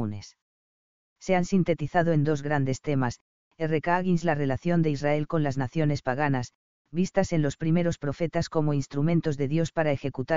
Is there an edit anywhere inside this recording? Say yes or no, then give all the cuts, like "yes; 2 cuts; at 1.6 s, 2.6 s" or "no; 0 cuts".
no; 0 cuts